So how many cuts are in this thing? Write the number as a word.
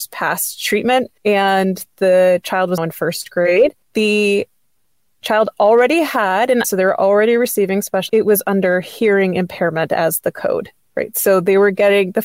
five